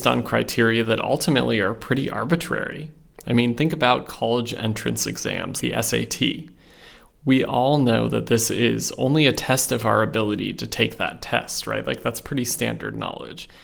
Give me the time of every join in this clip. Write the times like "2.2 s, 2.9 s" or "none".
5.6 s